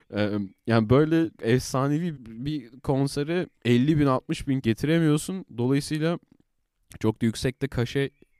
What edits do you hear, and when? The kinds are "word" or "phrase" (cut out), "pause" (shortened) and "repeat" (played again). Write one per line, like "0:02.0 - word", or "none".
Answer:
0:01.4 - word
0:02.1 - phrase
0:03.5 - pause
0:04.6 - phrase

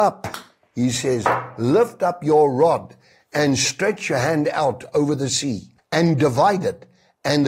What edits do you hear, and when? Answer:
0:05.8 - pause

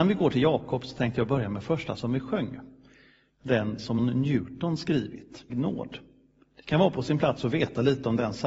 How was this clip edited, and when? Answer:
0:02.0 - word
0:04.0 - word
0:05.5 - word

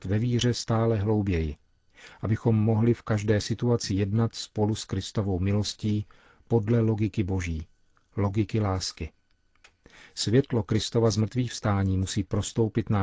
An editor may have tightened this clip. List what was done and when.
none

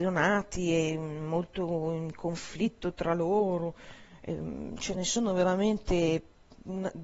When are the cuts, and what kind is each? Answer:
none

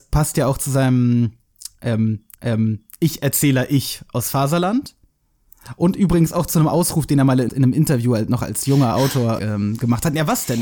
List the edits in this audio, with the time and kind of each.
0:02.3 - repeat
0:07.5 - phrase
0:09.4 - word

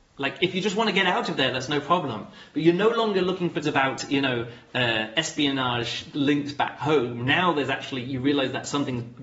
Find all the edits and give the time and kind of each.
0:03.6 - word

